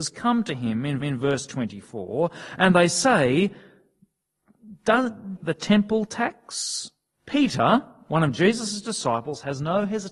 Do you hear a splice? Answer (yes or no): yes